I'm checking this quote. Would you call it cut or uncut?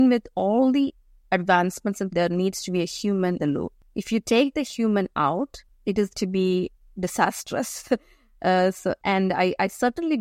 cut